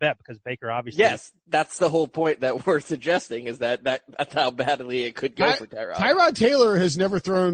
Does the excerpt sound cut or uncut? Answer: cut